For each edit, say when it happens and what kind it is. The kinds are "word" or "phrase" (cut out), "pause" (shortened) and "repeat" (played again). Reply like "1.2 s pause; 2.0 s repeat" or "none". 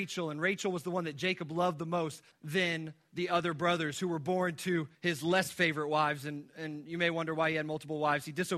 2.3 s phrase; 4.9 s pause